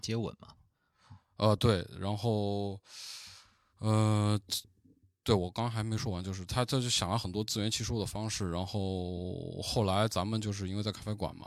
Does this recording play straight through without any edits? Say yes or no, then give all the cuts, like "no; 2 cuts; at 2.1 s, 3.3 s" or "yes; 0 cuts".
yes; 0 cuts